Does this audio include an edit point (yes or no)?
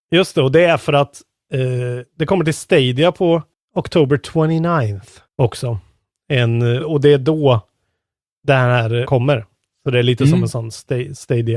yes